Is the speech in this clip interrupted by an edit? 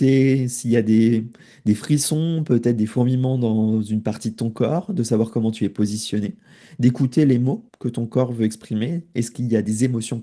yes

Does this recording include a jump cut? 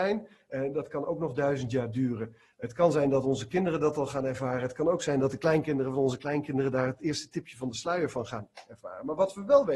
no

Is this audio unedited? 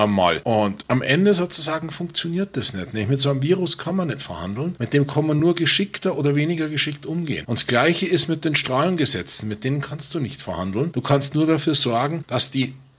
yes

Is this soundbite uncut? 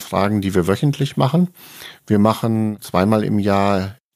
yes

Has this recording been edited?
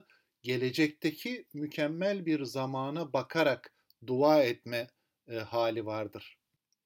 no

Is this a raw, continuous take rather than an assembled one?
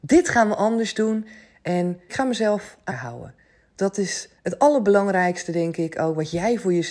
no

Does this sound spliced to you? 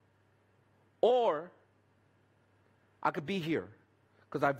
no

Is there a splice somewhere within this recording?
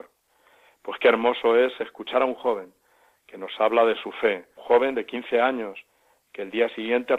yes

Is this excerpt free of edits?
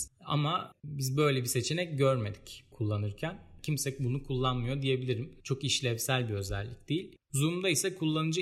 no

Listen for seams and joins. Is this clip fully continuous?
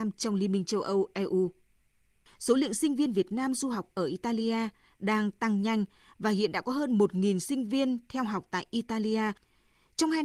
yes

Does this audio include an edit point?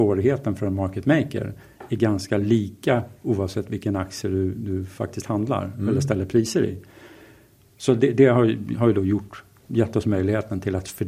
no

